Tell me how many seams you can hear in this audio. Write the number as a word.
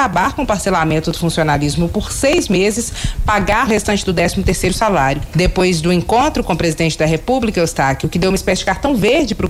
one